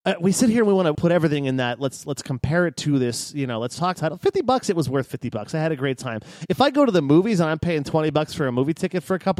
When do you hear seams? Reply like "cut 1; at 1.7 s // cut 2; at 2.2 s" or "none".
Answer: cut 1; at 0.9 s // cut 2; at 3.9 s